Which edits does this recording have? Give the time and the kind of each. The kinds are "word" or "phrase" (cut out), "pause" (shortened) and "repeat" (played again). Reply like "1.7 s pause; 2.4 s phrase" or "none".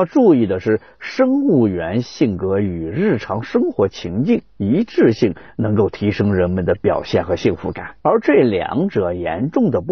8.0 s pause